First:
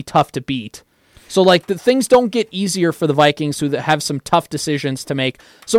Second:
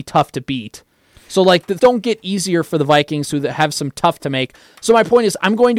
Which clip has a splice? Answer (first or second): second